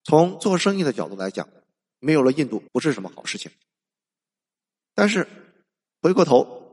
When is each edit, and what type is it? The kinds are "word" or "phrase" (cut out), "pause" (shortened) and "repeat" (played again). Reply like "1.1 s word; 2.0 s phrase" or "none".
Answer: 2.7 s pause